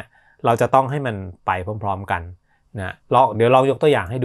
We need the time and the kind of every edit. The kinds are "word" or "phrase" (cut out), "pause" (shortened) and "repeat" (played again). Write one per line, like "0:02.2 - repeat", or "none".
0:03.0 - pause